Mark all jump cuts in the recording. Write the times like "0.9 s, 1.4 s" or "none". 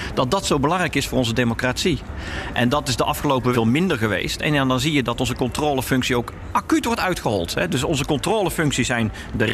3.5 s

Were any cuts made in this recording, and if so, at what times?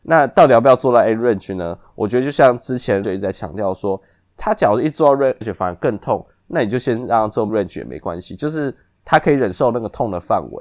3.0 s, 5.4 s, 7.5 s

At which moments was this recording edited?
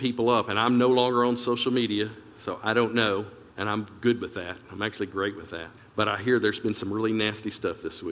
3.5 s, 5.8 s

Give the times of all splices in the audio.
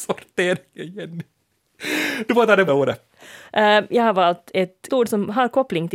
2.7 s, 4.9 s

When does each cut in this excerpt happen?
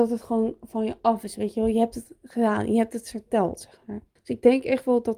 4.2 s

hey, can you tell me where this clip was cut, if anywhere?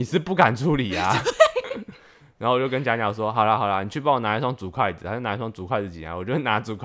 none

